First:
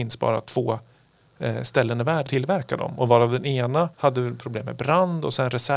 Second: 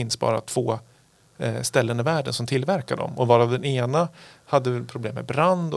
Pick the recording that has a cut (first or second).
first